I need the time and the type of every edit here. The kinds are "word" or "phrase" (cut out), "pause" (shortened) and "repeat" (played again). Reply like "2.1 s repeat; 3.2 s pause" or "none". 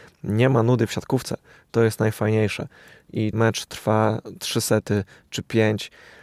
3.3 s word